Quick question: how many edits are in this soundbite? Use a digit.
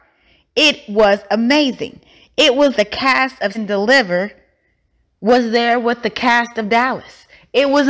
2